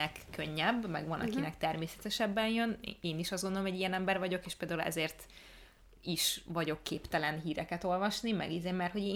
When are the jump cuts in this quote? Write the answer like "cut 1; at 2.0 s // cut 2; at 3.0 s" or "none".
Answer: none